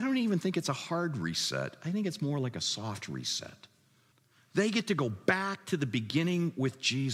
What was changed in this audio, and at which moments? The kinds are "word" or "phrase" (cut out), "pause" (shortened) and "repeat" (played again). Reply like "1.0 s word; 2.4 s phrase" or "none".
4.1 s pause